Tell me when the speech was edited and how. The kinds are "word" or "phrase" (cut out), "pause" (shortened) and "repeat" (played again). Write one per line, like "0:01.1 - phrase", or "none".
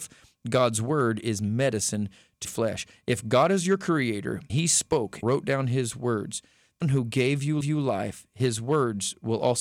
0:02.4 - word
0:04.5 - word
0:05.2 - word
0:06.8 - word
0:07.6 - repeat